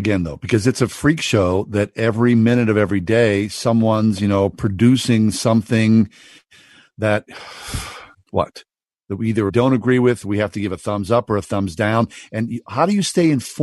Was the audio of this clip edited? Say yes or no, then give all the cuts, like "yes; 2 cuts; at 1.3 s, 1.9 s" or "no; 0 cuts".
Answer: yes; 2 cuts; at 8.1 s, 9.5 s